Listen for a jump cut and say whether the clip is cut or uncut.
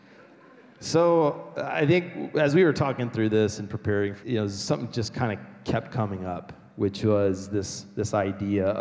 cut